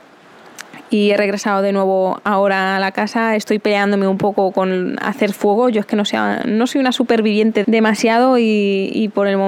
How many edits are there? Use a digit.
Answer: 1